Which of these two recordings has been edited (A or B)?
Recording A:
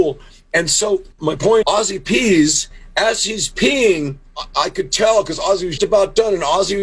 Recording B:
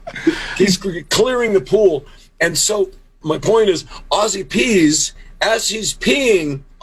A